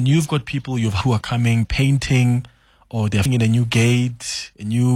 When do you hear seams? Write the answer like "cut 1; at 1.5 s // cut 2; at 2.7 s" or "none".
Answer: cut 1; at 1.0 s // cut 2; at 1.6 s // cut 3; at 3.3 s